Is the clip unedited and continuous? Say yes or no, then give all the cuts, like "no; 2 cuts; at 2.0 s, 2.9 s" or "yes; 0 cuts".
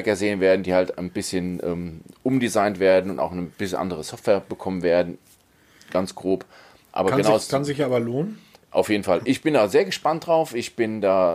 yes; 0 cuts